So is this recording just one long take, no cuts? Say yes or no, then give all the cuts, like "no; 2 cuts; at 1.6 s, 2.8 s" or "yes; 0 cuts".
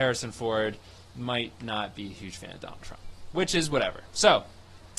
yes; 0 cuts